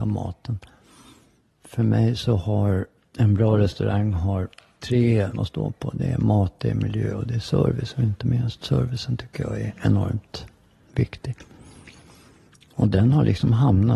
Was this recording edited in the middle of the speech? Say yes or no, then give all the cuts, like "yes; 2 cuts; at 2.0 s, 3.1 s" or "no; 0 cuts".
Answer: yes; 1 cut; at 5.3 s